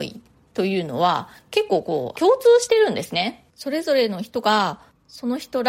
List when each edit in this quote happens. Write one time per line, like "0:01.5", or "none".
0:02.1
0:03.5